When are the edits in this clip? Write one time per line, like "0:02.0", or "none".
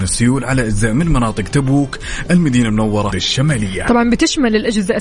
0:03.1